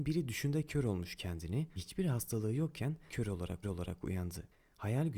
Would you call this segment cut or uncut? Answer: cut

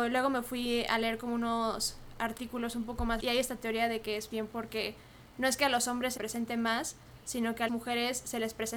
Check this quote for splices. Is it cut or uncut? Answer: cut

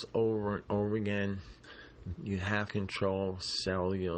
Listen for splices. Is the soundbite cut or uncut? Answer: cut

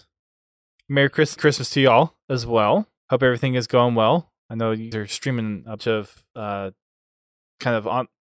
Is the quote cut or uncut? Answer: cut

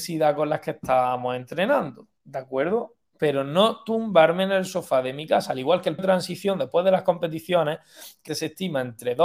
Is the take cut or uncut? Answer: cut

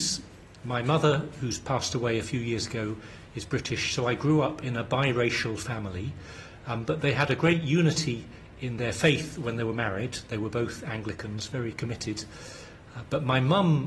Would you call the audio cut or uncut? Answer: uncut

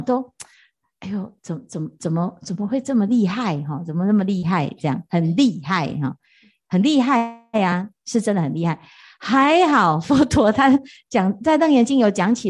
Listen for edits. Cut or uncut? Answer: uncut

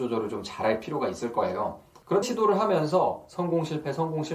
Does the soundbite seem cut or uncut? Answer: cut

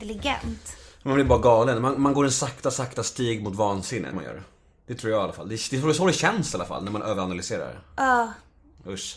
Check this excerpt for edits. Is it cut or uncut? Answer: cut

